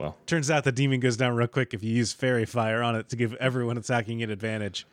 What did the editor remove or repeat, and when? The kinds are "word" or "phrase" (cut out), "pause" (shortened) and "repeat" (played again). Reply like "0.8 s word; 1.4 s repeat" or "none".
none

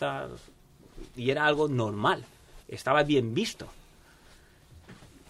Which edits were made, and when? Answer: 2.6 s pause

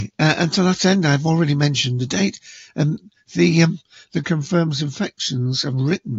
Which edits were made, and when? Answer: 4.2 s phrase

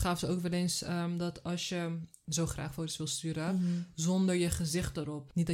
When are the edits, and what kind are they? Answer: none

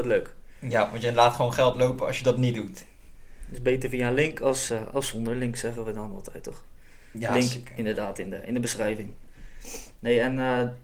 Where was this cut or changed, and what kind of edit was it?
none

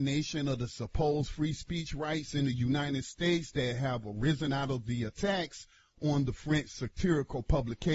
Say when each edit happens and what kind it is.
none

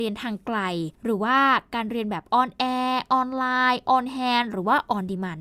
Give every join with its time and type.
0.9 s pause

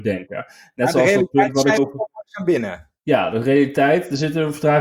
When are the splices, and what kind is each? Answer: 1.8 s word; 3.0 s pause

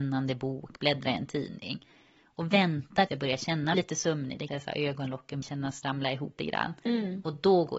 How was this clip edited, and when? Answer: 3.1 s word; 3.7 s word; 4.5 s word; 5.4 s word; 5.8 s word; 6.4 s word

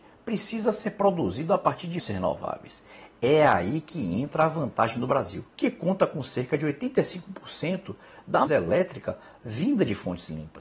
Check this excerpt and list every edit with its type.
2.0 s word; 5.5 s pause; 8.5 s word

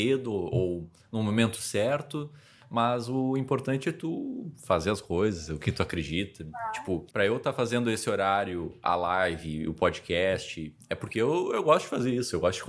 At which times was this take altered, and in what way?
7.1 s pause

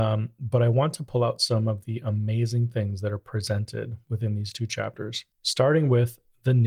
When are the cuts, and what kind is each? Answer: 5.3 s pause

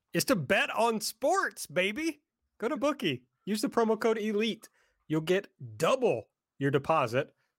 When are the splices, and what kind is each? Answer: 2.8 s word

